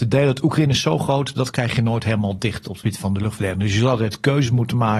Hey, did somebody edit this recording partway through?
no; 0 cuts

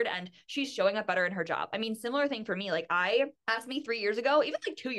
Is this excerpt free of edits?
no; 1 cut; at 3.4 s

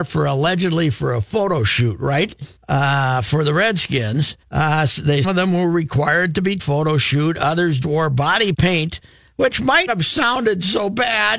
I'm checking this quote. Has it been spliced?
yes; 7 cuts; at 2.6 s, 4.4 s, 5.2 s, 6.6 s, 7.8 s, 8.5 s, 9.9 s

